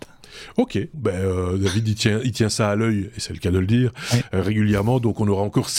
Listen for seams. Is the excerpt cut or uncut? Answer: cut